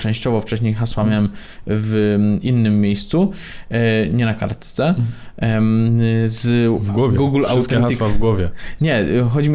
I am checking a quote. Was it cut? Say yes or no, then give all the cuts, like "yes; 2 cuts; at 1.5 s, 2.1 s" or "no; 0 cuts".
no; 0 cuts